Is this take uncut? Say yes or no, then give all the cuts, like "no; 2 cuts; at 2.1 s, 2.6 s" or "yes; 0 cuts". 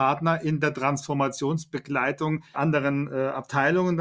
no; 1 cut; at 2.5 s